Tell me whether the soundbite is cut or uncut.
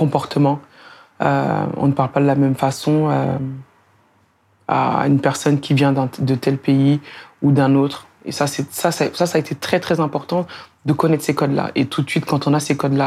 uncut